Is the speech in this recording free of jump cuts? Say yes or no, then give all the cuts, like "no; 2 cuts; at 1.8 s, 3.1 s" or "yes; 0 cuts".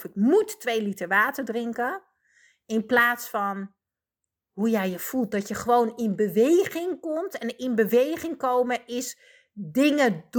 yes; 0 cuts